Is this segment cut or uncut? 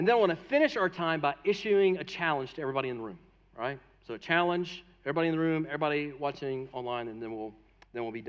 uncut